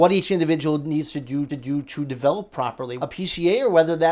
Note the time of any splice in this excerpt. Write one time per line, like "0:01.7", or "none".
0:01.5
0:03.0